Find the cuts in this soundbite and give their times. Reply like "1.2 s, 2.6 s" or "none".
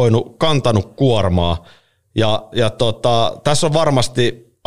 none